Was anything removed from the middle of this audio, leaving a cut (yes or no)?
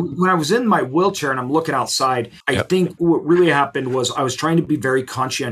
yes